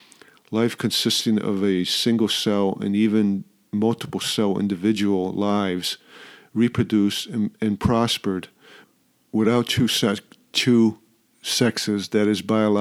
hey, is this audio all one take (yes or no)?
yes